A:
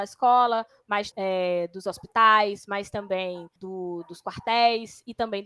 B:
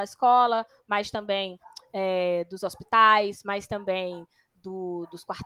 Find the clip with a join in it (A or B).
A